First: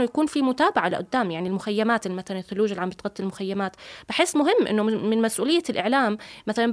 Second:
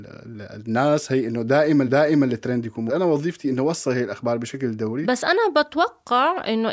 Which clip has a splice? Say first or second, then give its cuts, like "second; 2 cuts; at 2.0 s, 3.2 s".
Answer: second; 2 cuts; at 1.9 s, 2.9 s